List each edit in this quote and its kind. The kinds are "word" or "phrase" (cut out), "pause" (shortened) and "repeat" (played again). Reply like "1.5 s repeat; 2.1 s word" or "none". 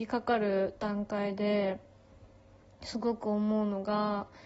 none

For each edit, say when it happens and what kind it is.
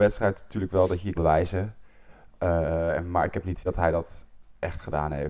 1.2 s word; 3.7 s word

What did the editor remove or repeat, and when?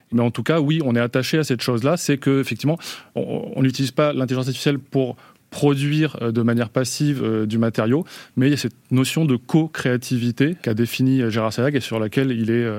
none

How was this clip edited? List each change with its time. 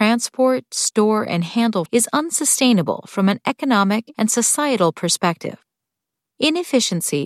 1.9 s word; 4.1 s word

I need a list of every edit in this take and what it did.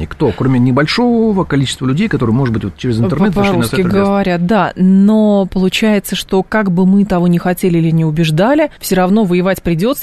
8.8 s pause

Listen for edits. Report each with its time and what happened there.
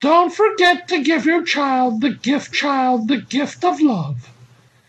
2.5 s repeat

